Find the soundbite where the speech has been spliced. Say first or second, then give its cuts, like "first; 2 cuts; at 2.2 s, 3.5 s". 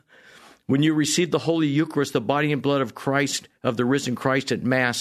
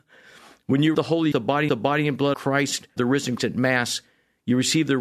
second; 6 cuts; at 0.9 s, 1.3 s, 1.7 s, 2.3 s, 3.0 s, 3.4 s